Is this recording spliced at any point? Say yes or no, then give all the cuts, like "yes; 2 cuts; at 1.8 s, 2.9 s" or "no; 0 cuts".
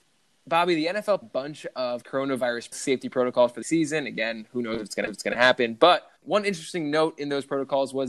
yes; 5 cuts; at 1.2 s, 2.7 s, 3.6 s, 5.1 s, 6.2 s